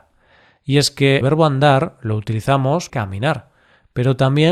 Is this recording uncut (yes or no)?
no